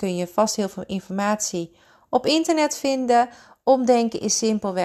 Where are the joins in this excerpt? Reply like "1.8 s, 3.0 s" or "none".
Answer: none